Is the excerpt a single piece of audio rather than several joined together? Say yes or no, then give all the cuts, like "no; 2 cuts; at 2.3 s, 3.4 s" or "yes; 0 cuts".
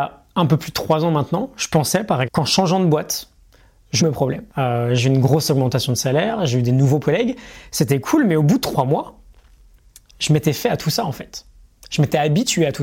no; 4 cuts; at 2.2 s, 4.0 s, 4.5 s, 7.0 s